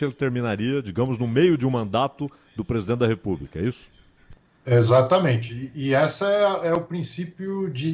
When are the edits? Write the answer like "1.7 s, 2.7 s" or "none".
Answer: none